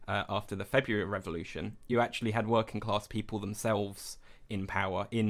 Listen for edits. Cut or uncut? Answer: uncut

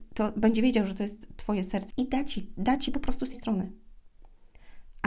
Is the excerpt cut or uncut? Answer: cut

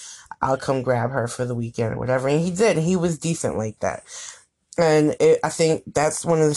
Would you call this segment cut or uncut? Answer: uncut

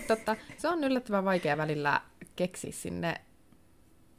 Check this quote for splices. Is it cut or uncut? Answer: uncut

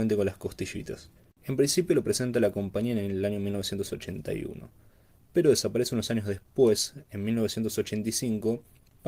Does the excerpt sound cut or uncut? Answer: cut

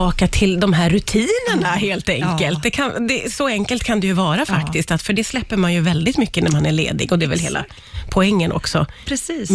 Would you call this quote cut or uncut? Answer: uncut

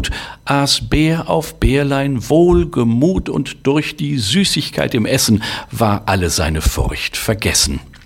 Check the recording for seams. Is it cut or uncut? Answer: uncut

